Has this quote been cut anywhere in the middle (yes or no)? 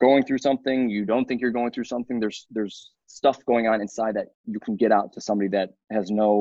no